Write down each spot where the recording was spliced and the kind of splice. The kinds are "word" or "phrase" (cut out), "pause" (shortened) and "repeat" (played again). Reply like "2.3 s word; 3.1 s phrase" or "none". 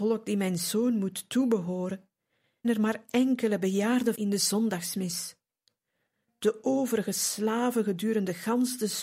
2.6 s word; 4.1 s word